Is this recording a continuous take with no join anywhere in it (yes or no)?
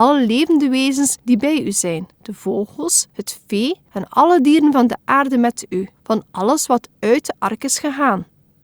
no